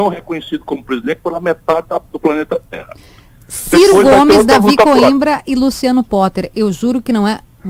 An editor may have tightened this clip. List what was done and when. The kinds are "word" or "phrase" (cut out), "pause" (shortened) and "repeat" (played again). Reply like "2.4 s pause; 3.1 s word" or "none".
none